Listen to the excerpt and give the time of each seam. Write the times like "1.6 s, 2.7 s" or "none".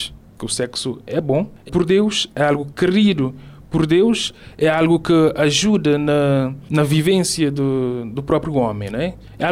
1.7 s